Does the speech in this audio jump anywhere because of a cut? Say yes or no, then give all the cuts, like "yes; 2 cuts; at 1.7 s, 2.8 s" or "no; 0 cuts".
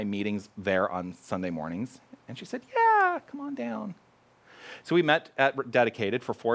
no; 0 cuts